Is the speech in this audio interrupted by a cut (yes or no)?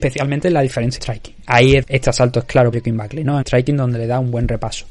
yes